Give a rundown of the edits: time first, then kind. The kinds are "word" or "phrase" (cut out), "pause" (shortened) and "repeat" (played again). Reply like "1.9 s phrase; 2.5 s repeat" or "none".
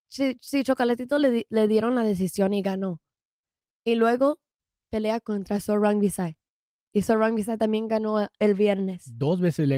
none